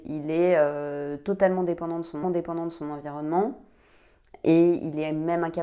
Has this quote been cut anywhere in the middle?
yes; 1 cut; at 2.2 s

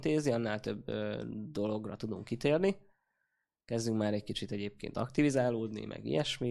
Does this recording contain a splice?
no; 0 cuts

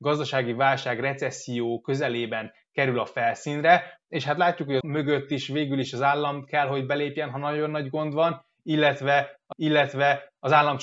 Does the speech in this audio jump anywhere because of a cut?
yes; 2 cuts; at 4.8 s, 9.5 s

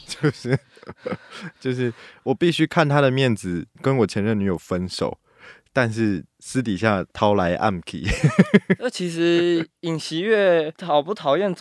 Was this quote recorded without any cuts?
no; 1 cut; at 7.1 s

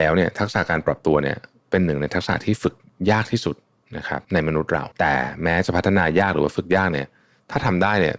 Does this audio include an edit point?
yes; 3 cuts; at 3.8 s, 4.2 s, 4.9 s

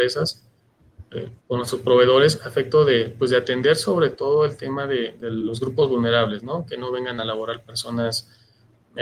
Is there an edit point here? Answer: yes; 1 cut; at 1.4 s

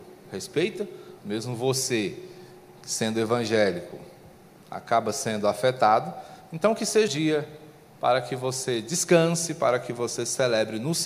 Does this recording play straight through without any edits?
no; 2 cuts; at 1.2 s, 7.1 s

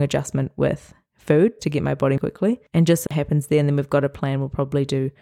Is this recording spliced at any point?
yes; 3 cuts; at 1.6 s, 2.2 s, 3.1 s

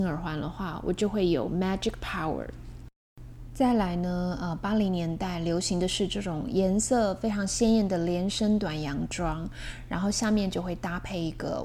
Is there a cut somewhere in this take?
no; 0 cuts

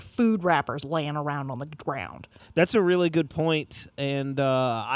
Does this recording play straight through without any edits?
yes; 0 cuts

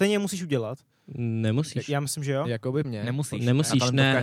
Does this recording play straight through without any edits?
no; 1 cut; at 2.8 s

